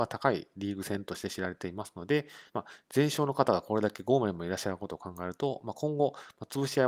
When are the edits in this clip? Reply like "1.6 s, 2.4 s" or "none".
2.5 s